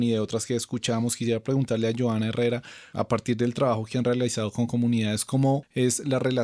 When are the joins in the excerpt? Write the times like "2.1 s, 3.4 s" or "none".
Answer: none